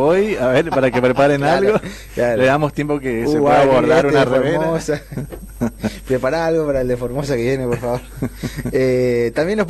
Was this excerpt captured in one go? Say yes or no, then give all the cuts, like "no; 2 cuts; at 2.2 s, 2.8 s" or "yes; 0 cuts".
yes; 0 cuts